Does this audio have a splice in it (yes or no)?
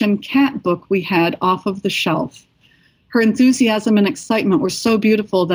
no